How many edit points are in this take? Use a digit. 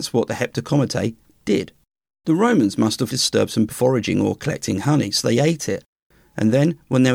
3